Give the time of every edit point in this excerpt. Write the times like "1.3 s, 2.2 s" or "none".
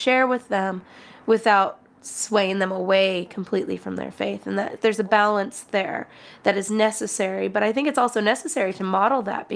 4.8 s

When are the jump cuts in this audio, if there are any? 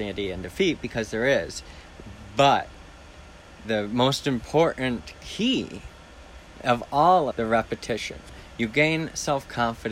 3.6 s, 7.3 s

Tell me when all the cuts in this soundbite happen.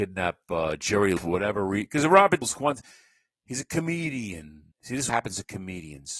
1.2 s, 2.4 s, 4.7 s, 5.1 s

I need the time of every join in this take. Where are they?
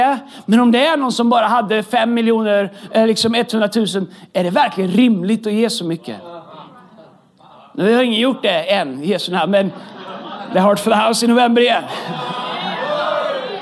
none

